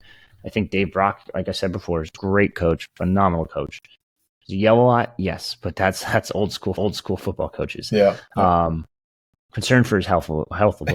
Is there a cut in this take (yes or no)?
yes